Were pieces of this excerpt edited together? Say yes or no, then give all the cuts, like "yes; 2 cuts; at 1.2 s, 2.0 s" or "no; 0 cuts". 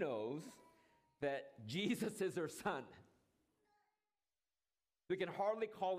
no; 0 cuts